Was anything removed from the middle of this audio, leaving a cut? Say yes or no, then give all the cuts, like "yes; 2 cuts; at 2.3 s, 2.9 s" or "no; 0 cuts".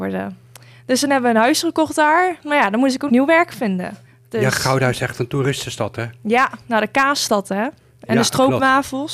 yes; 2 cuts; at 3.1 s, 4.1 s